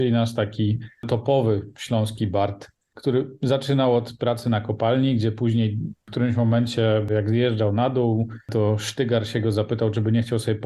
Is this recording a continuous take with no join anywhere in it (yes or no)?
yes